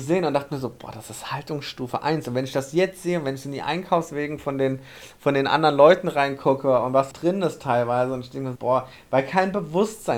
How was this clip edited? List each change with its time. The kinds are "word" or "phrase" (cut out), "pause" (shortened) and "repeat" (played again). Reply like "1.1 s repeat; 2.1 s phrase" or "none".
7.1 s word; 8.6 s word